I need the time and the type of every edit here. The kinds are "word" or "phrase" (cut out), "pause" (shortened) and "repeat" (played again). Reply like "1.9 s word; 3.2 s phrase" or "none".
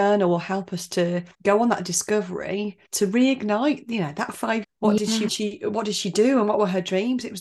1.3 s pause; 2.8 s pause; 4.6 s phrase; 5.3 s word